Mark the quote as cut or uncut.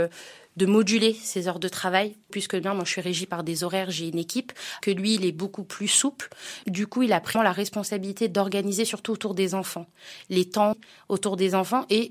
cut